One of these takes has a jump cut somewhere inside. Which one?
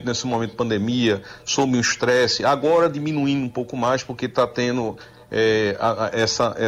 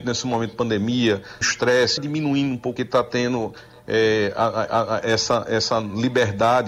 second; 4 cuts; at 1.4 s, 2.0 s, 2.8 s, 4.7 s

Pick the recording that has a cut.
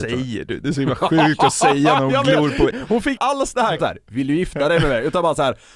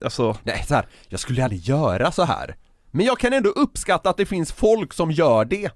first; 3 cuts; at 2.7 s, 3.2 s, 3.8 s

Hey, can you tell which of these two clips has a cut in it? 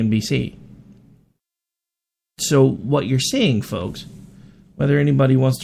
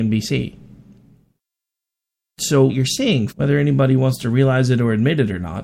second; 2 cuts; at 2.7 s, 3.3 s

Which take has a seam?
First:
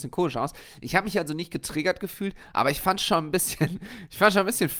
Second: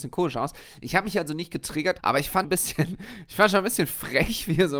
second; 2 cuts; at 2.0 s, 2.4 s

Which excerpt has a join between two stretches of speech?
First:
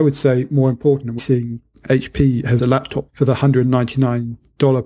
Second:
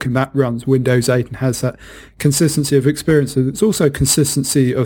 first; 4 cuts; at 1.2 s, 1.8 s, 2.6 s, 3.1 s

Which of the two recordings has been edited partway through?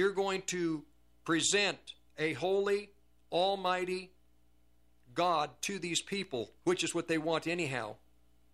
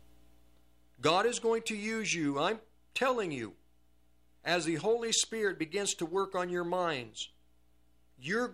first; 2 cuts; at 2.1 s, 6.6 s

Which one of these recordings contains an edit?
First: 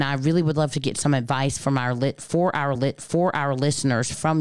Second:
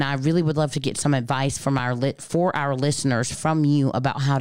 first; 1 cut; at 2.7 s

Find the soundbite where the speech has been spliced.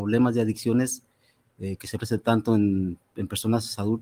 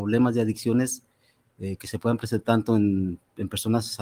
first; 1 cut; at 2.0 s

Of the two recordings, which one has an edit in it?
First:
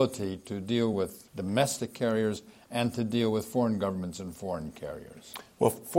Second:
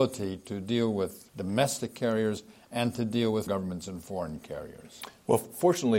second; 1 cut; at 3.5 s

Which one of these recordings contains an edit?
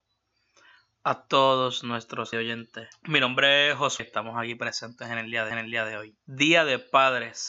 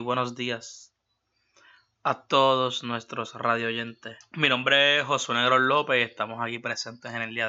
first; 3 cuts; at 2.3 s, 4.0 s, 5.5 s

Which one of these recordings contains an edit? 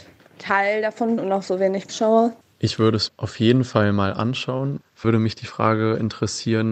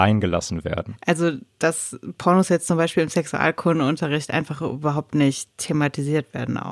first; 4 cuts; at 1.2 s, 1.9 s, 3.1 s, 5.0 s

